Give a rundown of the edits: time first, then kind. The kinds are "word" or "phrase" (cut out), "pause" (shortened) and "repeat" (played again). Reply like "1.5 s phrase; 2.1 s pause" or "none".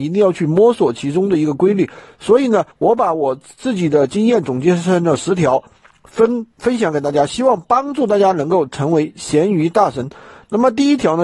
2.7 s pause; 6.5 s pause